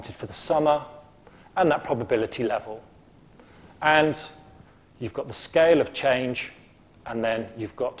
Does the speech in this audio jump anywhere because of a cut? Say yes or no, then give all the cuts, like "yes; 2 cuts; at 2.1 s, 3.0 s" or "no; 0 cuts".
no; 0 cuts